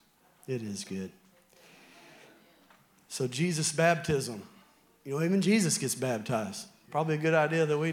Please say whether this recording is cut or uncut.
uncut